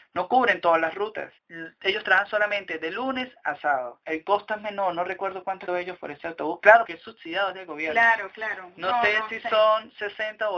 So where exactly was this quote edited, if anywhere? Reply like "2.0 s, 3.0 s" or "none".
5.7 s, 6.9 s